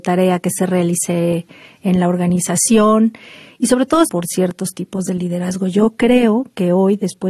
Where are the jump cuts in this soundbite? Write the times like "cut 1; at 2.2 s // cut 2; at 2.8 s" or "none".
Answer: cut 1; at 4.0 s